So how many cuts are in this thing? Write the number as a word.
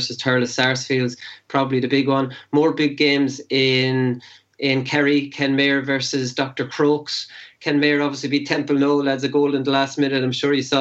zero